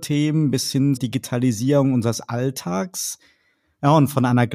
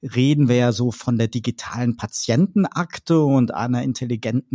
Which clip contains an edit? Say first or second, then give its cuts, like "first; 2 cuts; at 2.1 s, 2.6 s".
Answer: first; 1 cut; at 1.0 s